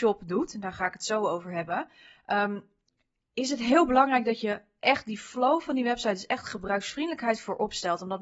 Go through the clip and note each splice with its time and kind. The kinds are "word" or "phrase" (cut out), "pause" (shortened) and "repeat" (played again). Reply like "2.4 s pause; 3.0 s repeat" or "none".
none